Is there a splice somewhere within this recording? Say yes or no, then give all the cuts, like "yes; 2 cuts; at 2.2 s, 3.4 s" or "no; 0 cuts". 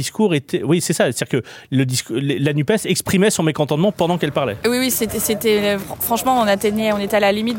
no; 0 cuts